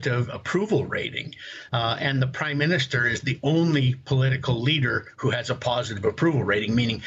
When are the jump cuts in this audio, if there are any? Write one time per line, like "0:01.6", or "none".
none